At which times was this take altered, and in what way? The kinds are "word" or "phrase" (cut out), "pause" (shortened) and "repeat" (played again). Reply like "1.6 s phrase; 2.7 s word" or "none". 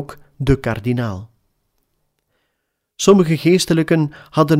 none